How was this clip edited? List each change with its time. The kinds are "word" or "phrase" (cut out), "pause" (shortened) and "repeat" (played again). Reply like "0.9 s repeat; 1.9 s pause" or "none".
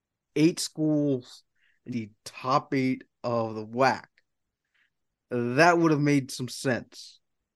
1.9 s phrase